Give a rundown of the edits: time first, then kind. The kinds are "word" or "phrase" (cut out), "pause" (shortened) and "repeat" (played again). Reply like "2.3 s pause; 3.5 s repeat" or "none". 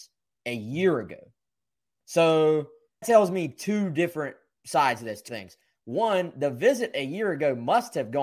3.0 s word; 5.3 s word